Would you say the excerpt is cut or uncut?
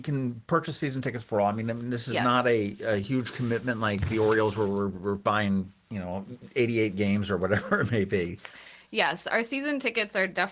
cut